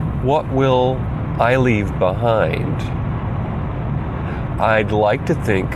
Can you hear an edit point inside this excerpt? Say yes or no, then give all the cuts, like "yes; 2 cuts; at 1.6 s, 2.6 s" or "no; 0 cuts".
no; 0 cuts